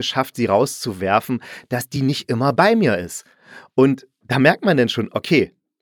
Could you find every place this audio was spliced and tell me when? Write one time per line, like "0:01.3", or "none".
none